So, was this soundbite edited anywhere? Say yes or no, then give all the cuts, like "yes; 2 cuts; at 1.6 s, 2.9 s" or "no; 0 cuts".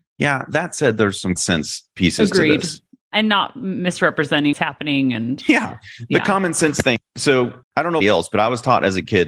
yes; 4 cuts; at 1.4 s, 4.5 s, 7.6 s, 8.0 s